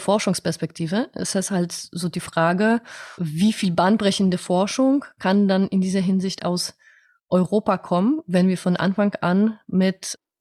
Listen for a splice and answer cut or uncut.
uncut